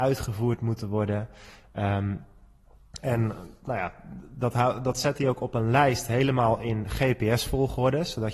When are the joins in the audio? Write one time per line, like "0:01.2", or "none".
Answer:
none